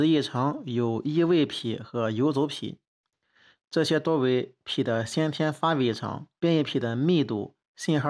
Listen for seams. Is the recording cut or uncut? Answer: cut